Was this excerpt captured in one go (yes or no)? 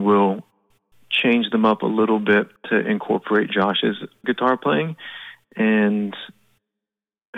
no